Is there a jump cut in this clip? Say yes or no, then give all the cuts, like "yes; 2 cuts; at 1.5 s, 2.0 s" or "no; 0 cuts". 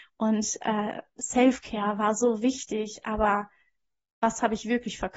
no; 0 cuts